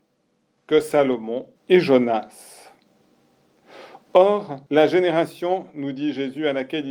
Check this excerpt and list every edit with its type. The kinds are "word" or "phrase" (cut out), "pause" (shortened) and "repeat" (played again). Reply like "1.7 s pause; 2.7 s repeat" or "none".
1.6 s pause; 4.7 s pause